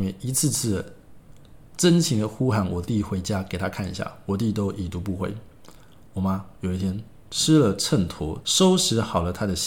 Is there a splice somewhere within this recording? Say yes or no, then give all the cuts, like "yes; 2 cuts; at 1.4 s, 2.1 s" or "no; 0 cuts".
yes; 1 cut; at 8.4 s